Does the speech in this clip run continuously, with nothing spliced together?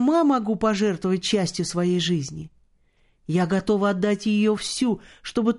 yes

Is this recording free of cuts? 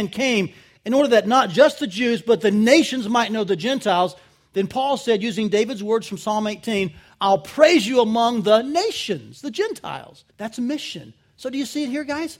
no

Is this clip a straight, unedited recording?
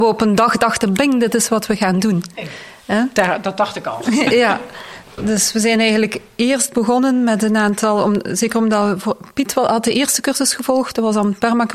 yes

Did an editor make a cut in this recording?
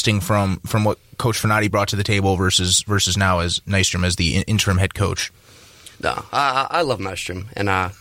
yes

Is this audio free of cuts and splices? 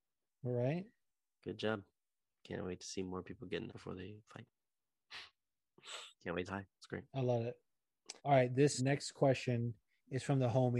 no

